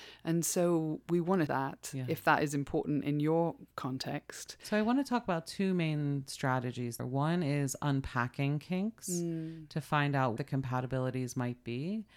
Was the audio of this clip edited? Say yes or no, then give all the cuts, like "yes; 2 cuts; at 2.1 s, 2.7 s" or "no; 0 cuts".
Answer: yes; 3 cuts; at 1.5 s, 7.0 s, 10.4 s